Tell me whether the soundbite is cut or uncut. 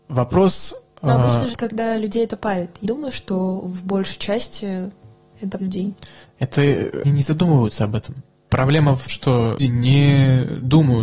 cut